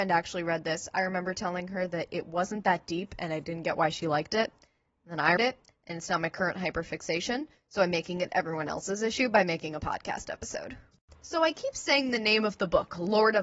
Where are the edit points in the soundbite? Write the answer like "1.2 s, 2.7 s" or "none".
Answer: 5.4 s

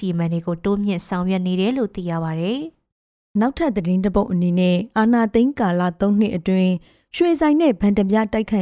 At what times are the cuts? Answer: none

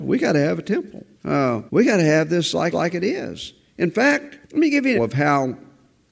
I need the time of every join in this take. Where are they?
1.1 s, 1.7 s, 2.7 s, 4.4 s, 4.9 s

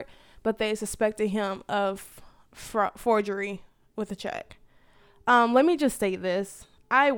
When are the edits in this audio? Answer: none

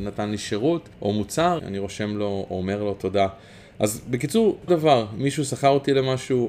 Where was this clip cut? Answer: 0.9 s, 1.6 s, 4.7 s

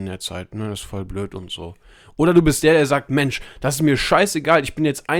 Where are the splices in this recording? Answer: none

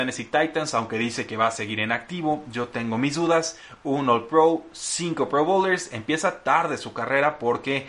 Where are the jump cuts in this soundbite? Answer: none

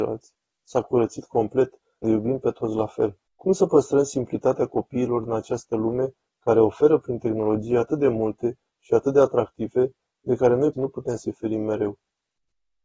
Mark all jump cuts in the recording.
2.0 s, 3.3 s, 10.7 s

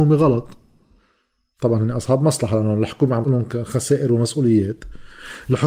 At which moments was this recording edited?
3.2 s

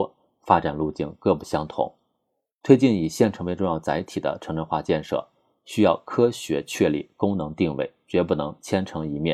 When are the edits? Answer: none

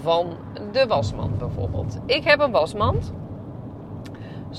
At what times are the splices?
none

